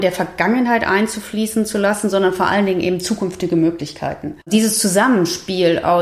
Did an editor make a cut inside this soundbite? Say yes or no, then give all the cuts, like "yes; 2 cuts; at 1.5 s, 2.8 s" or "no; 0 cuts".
yes; 1 cut; at 4.4 s